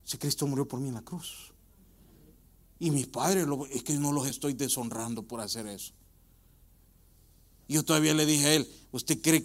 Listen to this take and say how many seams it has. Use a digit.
0